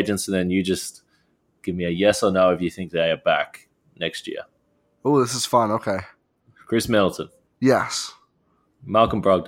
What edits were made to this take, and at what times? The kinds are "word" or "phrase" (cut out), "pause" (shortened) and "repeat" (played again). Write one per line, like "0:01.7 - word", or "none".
0:07.5 - pause